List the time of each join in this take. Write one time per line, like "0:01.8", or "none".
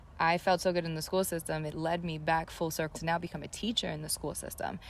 0:02.9